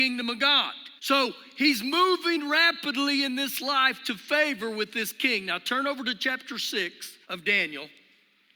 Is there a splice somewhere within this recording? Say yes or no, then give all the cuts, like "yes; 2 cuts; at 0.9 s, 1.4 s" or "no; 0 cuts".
yes; 2 cuts; at 1.0 s, 7.2 s